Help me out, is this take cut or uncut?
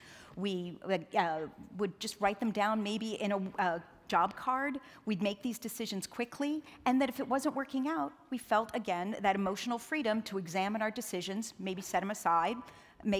uncut